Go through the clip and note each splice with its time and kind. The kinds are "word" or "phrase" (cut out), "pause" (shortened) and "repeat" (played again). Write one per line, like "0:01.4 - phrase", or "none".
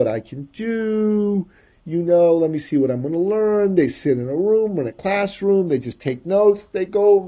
none